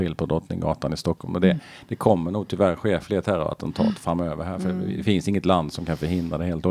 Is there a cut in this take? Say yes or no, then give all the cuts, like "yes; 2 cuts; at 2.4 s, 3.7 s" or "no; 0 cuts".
no; 0 cuts